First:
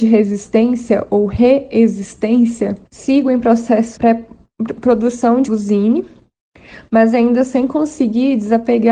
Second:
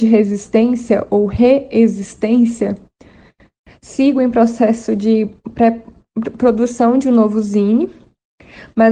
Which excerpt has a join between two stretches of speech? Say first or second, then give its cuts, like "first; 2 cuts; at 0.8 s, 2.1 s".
first; 3 cuts; at 2.9 s, 4.0 s, 5.5 s